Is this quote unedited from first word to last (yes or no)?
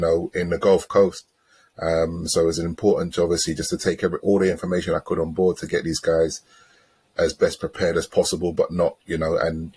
yes